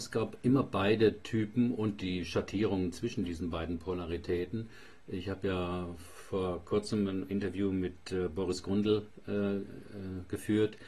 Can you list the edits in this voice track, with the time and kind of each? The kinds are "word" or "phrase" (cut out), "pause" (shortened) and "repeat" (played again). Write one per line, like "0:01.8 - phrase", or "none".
none